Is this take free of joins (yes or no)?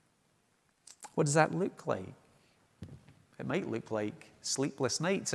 no